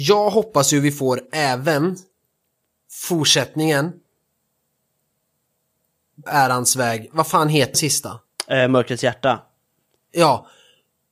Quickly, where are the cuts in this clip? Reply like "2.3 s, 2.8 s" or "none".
6.3 s, 7.7 s